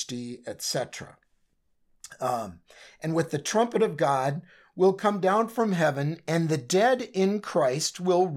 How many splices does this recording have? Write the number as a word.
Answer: zero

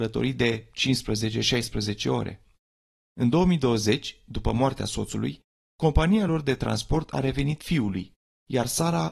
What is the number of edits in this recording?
zero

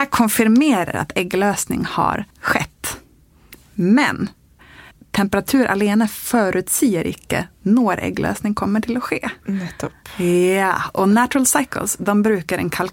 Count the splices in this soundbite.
three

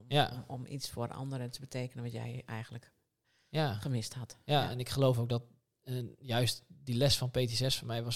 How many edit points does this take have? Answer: zero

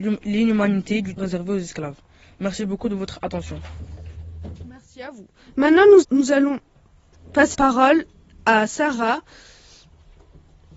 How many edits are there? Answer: three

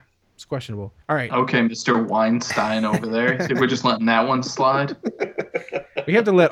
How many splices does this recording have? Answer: one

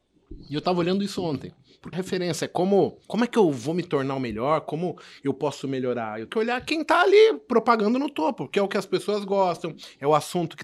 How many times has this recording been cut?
three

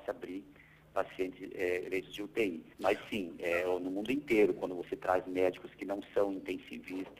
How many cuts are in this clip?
one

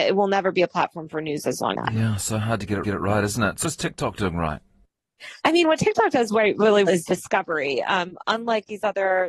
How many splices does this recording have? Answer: five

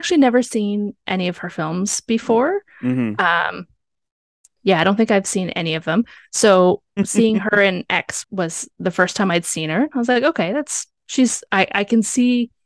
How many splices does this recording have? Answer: one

